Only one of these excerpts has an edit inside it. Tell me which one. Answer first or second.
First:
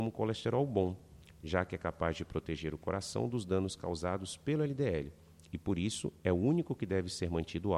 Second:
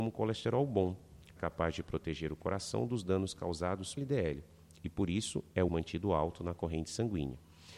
second